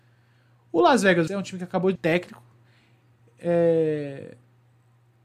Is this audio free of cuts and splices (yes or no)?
no